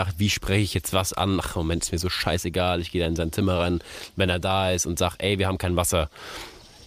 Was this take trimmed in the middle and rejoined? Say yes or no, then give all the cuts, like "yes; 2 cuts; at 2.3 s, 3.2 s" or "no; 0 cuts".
no; 0 cuts